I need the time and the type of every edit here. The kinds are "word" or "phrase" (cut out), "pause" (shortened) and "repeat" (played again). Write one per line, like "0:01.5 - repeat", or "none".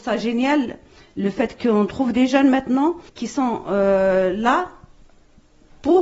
0:03.1 - pause